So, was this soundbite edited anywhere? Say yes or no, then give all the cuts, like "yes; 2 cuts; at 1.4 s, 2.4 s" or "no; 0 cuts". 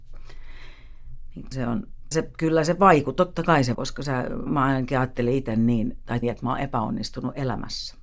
yes; 5 cuts; at 1.5 s, 2.1 s, 3.7 s, 4.5 s, 6.2 s